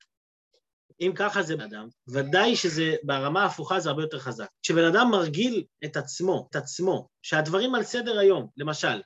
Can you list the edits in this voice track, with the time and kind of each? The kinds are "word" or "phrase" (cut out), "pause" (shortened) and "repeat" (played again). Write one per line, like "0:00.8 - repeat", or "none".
0:01.6 - phrase
0:04.5 - pause
0:06.5 - repeat